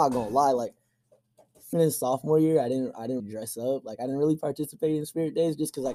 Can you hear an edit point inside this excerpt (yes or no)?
yes